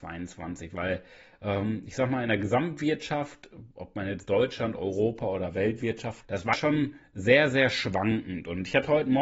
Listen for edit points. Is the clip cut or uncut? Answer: cut